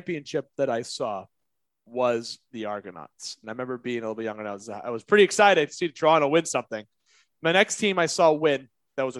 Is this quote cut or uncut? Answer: uncut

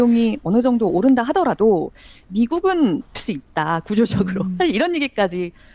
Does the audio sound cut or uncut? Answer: cut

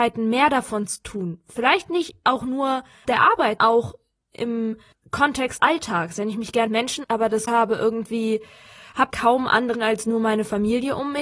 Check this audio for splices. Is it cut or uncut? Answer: cut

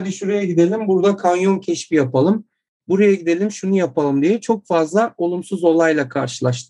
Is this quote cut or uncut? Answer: uncut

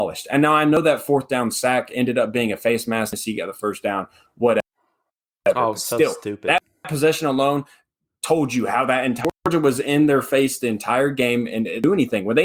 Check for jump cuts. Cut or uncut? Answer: cut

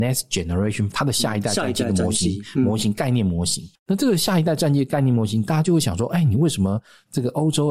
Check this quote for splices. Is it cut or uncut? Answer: cut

